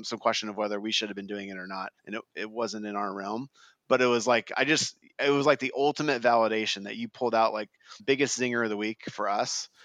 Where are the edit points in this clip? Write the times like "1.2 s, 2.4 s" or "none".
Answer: 2.0 s, 8.0 s